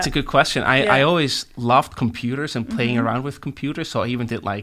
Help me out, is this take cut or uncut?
uncut